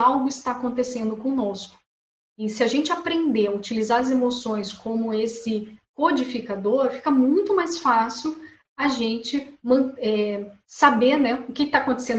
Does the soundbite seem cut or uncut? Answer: uncut